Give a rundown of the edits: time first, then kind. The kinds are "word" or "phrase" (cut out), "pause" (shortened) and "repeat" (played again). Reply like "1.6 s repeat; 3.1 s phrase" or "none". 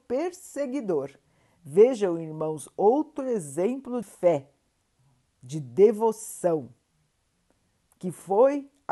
4.0 s word